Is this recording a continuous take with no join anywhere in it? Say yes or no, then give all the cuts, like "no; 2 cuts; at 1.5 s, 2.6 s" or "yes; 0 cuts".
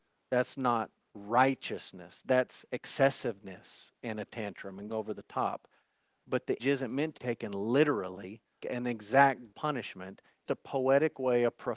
no; 7 cuts; at 4.3 s, 4.9 s, 6.6 s, 7.2 s, 8.6 s, 9.5 s, 10.5 s